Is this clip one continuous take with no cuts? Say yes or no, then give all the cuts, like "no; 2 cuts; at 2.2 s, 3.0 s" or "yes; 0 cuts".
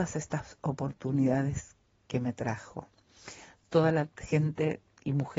yes; 0 cuts